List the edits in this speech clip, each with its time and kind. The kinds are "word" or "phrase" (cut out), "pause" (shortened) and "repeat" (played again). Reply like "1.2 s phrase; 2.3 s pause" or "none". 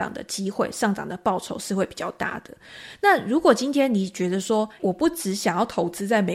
4.8 s word